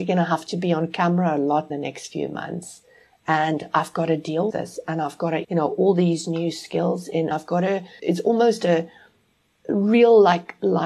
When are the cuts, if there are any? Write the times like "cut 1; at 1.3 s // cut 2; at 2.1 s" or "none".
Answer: cut 1; at 1.7 s // cut 2; at 4.5 s // cut 3; at 5.4 s // cut 4; at 7.3 s // cut 5; at 8.0 s